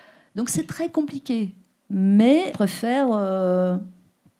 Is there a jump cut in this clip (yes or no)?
yes